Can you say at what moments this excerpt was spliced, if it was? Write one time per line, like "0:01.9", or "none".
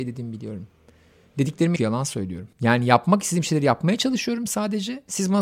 0:01.8
0:02.5